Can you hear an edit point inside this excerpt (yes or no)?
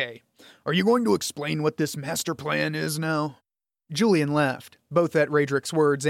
no